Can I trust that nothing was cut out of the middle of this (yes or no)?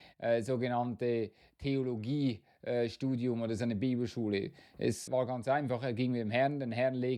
no